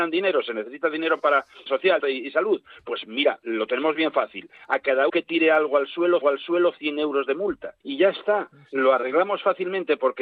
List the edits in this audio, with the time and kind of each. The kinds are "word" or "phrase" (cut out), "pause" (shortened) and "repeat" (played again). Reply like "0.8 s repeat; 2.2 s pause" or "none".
1.7 s word; 2.0 s word; 5.1 s word; 6.2 s repeat; 7.8 s pause